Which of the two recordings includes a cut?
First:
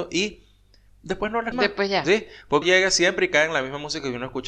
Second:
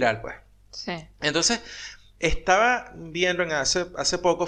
first; 2 cuts; at 1.5 s, 2.6 s

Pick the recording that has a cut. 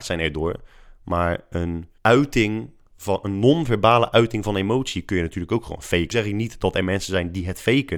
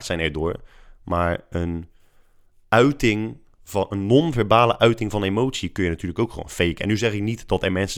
first; 2 cuts; at 2.0 s, 6.1 s

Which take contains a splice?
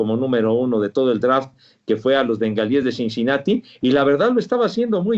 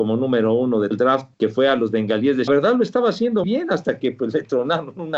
second; 4 cuts; at 0.9 s, 1.3 s, 2.5 s, 3.4 s

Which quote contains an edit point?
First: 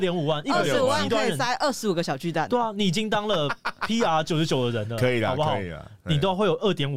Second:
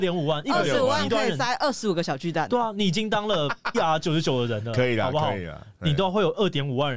second; 1 cut; at 3.7 s

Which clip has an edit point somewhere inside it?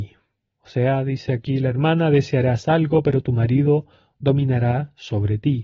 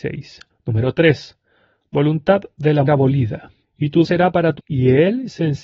second; 3 cuts; at 2.9 s, 4.0 s, 4.6 s

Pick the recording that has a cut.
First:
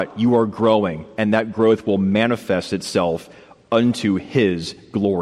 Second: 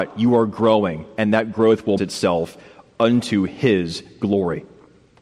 second; 1 cut; at 2.0 s

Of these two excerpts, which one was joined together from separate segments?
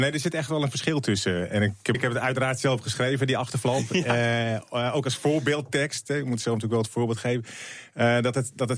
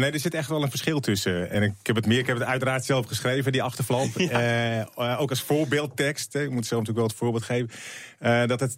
first; 1 cut; at 1.9 s

